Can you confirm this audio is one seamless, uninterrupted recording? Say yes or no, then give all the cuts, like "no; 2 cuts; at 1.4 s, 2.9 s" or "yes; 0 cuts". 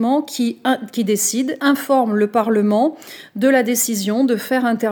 no; 1 cut; at 1.6 s